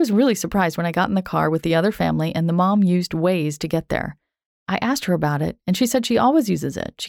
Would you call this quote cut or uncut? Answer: uncut